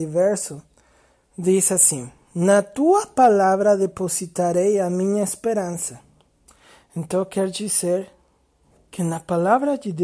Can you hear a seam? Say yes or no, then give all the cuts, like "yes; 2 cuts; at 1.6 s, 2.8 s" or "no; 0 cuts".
no; 0 cuts